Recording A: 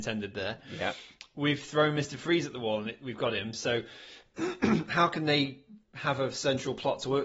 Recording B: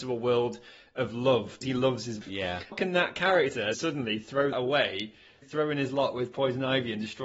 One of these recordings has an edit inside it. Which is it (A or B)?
B